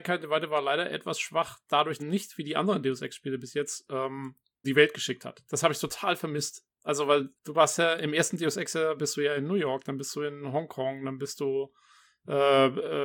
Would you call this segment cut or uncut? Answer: cut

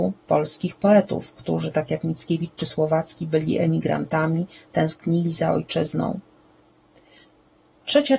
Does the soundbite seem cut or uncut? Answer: uncut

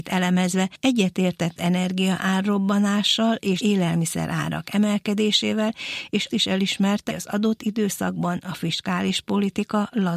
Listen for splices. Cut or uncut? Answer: cut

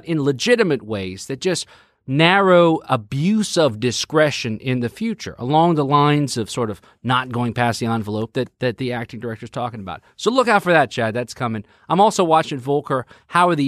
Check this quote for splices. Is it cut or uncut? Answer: uncut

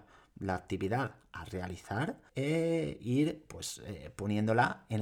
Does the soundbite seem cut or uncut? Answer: cut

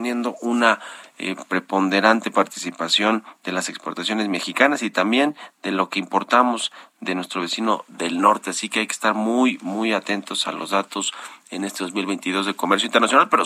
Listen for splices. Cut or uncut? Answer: uncut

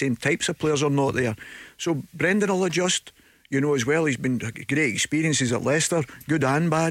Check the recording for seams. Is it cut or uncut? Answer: uncut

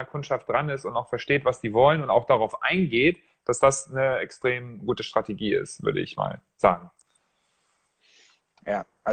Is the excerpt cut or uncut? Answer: uncut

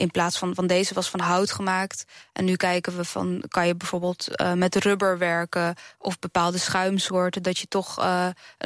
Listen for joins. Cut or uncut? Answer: uncut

